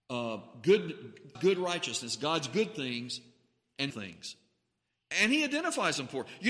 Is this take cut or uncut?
cut